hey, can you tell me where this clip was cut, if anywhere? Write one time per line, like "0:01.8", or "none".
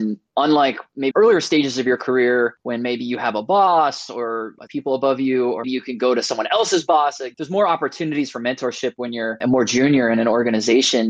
0:01.1
0:04.7
0:05.6
0:07.3